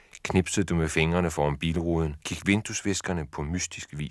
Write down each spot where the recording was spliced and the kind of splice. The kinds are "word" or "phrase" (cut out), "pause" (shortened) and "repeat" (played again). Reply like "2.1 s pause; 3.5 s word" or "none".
2.2 s pause

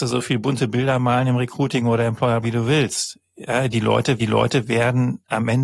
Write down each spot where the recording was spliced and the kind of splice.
2.4 s word; 4.2 s repeat

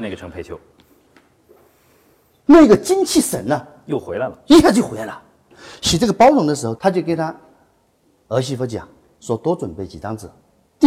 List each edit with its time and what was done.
none

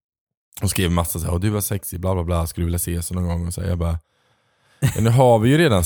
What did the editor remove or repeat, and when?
none

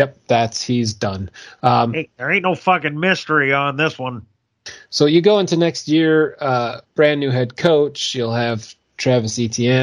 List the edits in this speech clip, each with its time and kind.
6.9 s pause

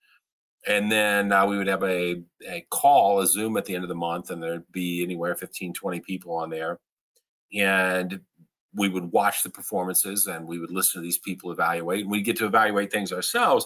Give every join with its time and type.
none

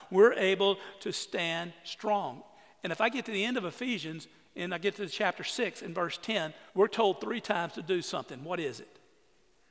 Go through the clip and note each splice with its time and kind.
6.7 s pause

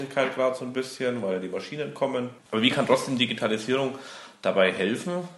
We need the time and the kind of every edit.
2.4 s pause

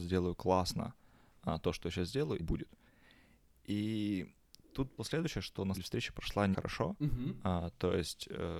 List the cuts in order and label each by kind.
2.4 s phrase; 5.0 s word; 5.7 s word; 6.5 s word

